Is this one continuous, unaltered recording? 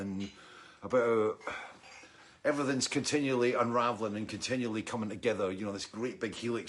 yes; 0 cuts

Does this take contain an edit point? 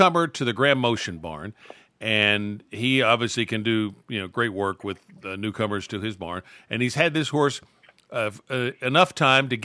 no; 0 cuts

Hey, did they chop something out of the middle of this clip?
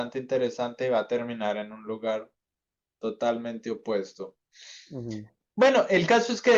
no; 0 cuts

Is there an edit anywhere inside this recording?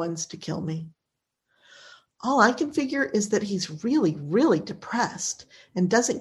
no; 0 cuts

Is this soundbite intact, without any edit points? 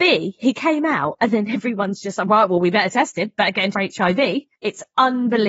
no; 1 cut; at 3.7 s

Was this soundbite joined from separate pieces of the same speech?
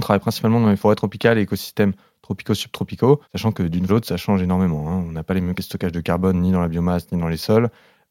yes; 3 cuts; at 3.2 s, 3.9 s, 5.6 s

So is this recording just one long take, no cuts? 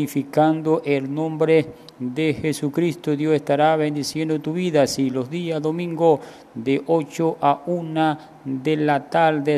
yes; 0 cuts

